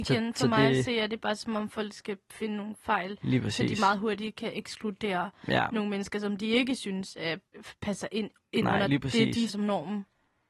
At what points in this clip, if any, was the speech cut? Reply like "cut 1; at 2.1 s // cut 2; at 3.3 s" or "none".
cut 1; at 7.5 s // cut 2; at 9.5 s